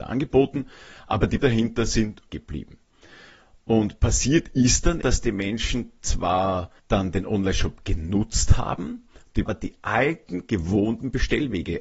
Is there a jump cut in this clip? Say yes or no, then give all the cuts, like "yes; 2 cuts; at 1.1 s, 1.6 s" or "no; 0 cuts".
yes; 5 cuts; at 1.4 s, 2.3 s, 5.0 s, 6.8 s, 9.5 s